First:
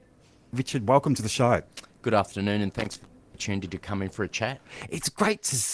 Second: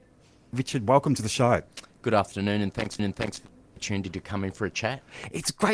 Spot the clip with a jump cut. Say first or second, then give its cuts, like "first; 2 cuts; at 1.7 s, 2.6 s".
second; 1 cut; at 3.0 s